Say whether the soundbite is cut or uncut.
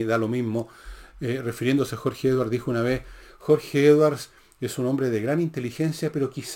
uncut